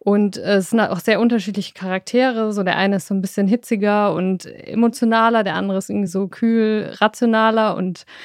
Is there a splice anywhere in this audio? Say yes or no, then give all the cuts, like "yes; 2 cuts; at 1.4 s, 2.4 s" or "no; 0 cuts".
no; 0 cuts